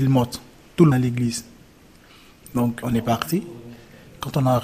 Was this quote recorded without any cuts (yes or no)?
no